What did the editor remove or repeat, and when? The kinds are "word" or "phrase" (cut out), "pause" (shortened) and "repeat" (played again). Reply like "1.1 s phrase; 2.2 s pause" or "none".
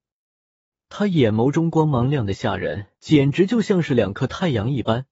2.9 s pause